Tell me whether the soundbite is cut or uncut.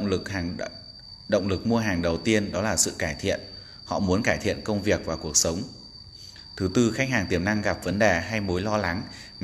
uncut